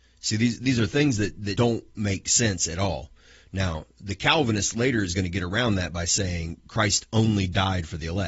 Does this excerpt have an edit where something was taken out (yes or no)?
yes